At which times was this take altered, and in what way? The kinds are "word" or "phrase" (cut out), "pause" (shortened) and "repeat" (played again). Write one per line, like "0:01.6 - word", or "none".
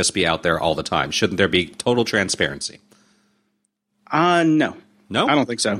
none